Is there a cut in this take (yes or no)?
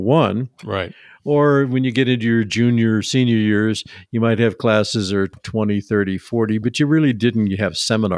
no